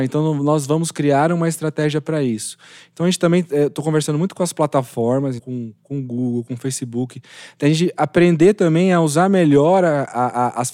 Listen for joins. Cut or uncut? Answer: cut